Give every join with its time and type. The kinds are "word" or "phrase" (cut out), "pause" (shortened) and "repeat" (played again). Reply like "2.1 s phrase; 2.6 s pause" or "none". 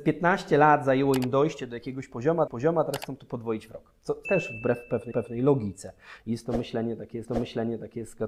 2.5 s repeat; 4.2 s phrase; 5.1 s repeat; 7.2 s repeat

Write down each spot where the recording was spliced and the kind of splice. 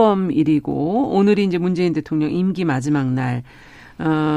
none

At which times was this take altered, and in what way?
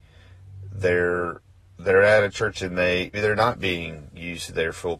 3.1 s word

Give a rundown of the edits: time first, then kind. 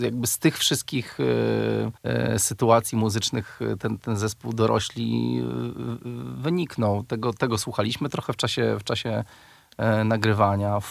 2.0 s pause

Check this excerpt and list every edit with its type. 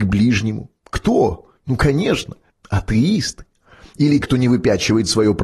1.6 s pause; 4.2 s word

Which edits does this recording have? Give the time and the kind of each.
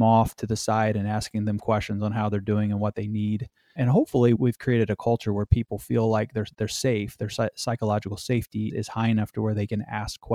3.8 s word; 4.4 s word; 8.7 s word

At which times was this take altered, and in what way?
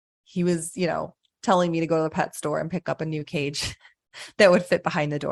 none

